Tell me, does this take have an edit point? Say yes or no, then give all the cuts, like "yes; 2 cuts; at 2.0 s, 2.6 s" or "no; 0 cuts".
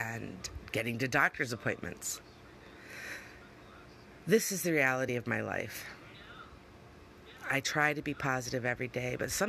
no; 0 cuts